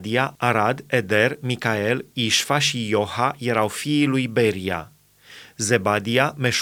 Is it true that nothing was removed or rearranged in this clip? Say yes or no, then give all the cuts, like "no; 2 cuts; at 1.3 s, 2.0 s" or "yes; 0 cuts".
yes; 0 cuts